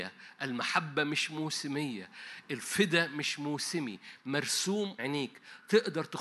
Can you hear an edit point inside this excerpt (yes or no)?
yes